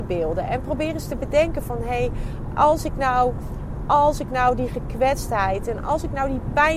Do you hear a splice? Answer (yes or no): no